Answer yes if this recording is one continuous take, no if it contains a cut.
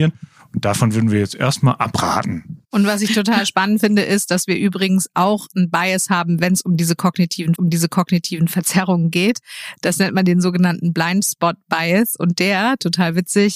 no